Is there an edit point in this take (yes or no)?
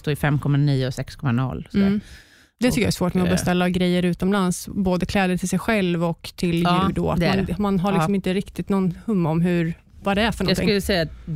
no